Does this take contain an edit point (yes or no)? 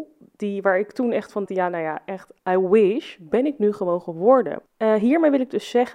yes